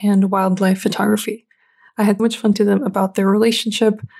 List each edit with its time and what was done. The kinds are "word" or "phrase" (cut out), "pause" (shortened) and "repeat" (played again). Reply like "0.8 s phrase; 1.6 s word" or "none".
2.2 s word; 2.5 s word